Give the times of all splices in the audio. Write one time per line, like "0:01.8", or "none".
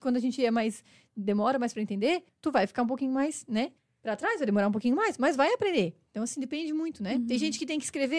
0:02.3
0:03.8

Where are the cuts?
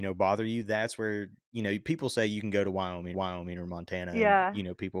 0:03.1

